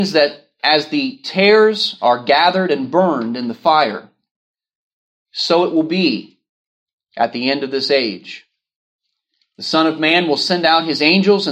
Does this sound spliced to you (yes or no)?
no